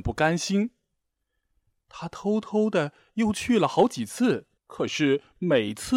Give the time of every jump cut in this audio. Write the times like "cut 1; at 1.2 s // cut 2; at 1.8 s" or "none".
cut 1; at 4.6 s